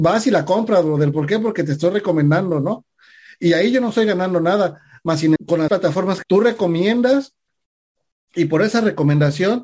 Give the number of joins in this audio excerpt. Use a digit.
3